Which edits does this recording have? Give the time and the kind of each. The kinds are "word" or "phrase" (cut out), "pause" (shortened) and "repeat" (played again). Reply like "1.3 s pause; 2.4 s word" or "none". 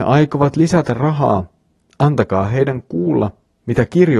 none